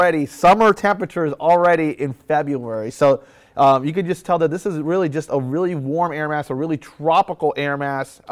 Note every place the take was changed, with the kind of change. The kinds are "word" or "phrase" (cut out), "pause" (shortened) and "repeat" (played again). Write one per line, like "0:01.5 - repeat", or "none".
none